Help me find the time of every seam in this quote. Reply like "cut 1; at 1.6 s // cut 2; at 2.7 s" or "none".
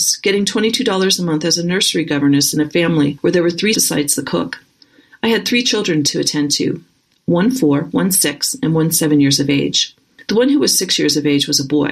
cut 1; at 3.7 s